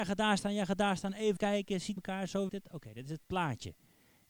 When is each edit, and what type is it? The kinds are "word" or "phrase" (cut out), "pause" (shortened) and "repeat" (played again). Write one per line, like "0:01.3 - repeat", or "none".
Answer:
0:01.4 - phrase
0:02.0 - word
0:02.5 - word